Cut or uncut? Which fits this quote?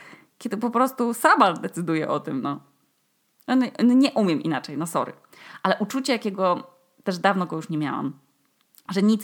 uncut